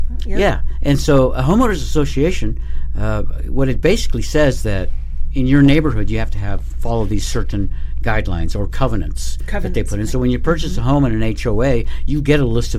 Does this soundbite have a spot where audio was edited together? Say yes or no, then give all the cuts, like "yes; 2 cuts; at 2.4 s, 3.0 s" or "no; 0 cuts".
no; 0 cuts